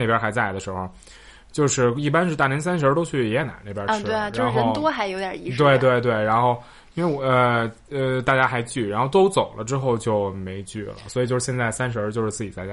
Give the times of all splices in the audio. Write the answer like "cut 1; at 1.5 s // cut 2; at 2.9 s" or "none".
none